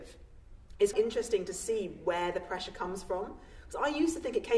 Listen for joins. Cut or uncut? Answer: cut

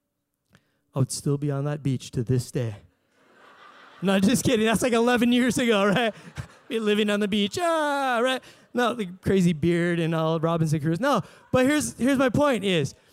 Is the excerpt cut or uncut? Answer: uncut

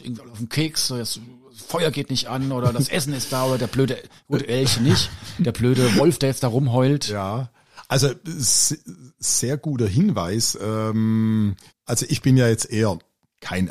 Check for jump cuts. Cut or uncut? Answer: cut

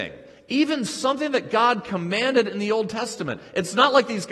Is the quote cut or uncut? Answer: uncut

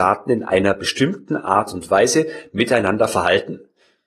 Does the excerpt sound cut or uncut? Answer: uncut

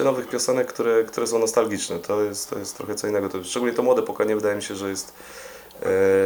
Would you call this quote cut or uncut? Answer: uncut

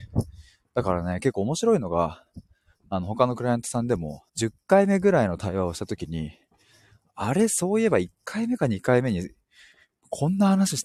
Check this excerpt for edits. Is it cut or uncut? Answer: cut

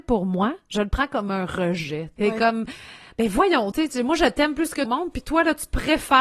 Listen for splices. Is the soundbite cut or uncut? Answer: cut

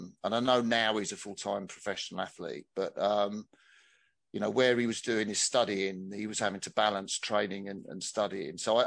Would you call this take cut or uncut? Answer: uncut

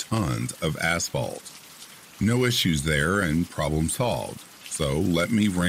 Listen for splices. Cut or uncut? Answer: uncut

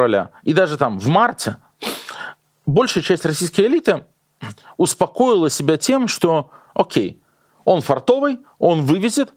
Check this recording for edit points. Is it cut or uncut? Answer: uncut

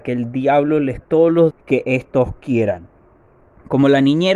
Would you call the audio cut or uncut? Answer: cut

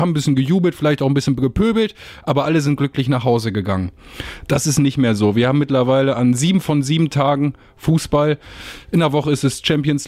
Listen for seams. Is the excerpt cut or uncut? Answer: uncut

